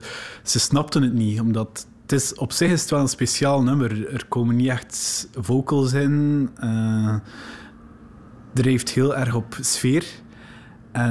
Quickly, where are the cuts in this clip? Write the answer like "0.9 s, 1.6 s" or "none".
none